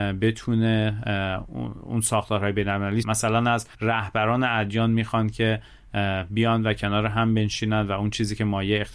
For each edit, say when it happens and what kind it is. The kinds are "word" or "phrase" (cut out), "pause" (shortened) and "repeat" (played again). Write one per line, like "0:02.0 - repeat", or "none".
0:03.0 - phrase
0:03.7 - pause